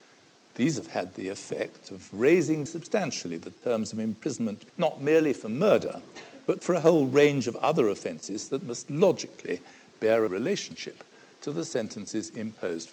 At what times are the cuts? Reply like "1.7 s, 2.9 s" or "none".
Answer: 2.7 s, 4.7 s, 10.3 s